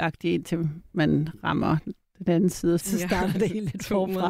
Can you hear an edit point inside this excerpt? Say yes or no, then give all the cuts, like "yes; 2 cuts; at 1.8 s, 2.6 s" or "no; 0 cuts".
yes; 1 cut; at 2.8 s